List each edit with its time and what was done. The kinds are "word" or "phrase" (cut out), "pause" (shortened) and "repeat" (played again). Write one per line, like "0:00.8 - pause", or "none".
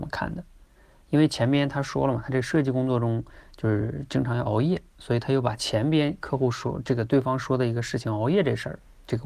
none